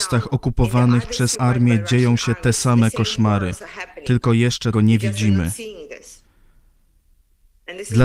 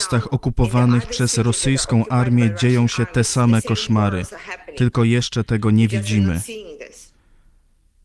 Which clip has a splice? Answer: first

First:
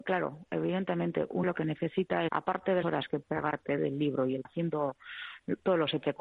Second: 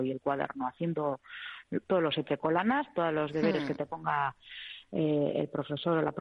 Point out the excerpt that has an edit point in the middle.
first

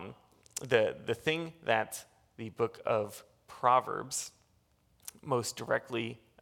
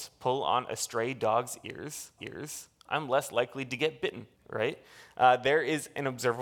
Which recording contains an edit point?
second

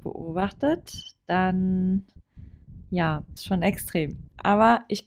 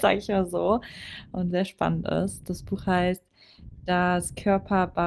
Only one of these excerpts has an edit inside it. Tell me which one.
first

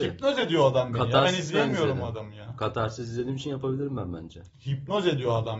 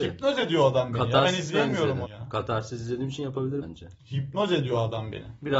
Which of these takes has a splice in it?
second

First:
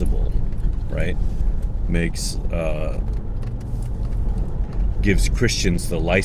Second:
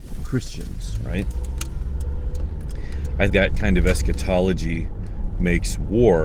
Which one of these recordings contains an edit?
second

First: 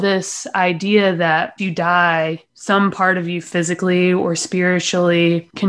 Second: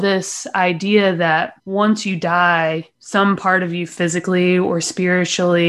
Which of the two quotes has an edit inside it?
first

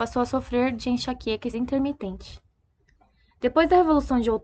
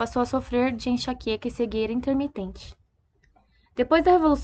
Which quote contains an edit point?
first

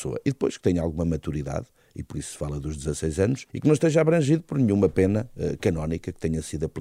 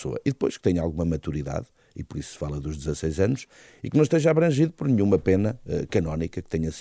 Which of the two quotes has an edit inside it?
first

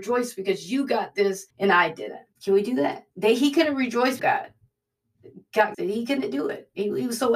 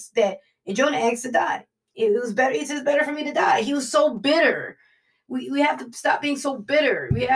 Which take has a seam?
first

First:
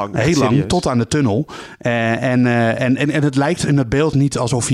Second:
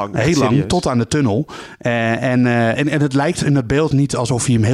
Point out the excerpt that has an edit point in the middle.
second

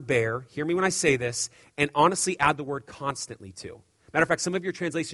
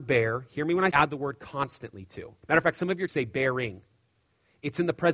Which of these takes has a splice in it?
second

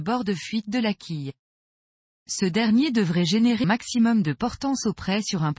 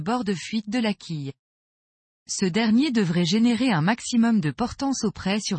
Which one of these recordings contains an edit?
first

